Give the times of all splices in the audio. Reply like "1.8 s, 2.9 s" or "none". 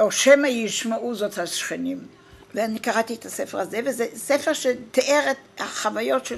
2.4 s